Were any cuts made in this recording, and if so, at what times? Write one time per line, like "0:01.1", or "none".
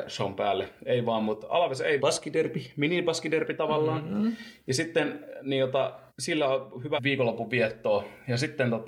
0:02.0
0:06.1
0:07.0